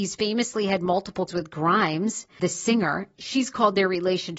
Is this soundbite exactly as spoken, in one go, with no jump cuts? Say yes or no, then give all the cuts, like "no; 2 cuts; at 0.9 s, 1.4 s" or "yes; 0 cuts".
no; 2 cuts; at 1.3 s, 2.4 s